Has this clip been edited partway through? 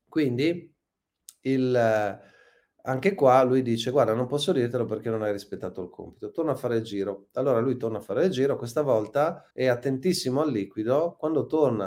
yes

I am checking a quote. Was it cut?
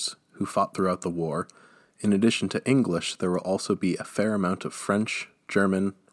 no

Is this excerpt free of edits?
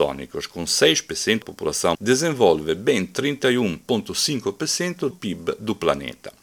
no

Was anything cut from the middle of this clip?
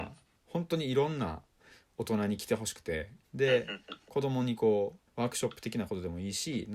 yes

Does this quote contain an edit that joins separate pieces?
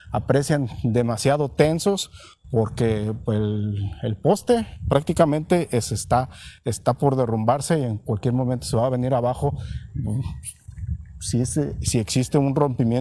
no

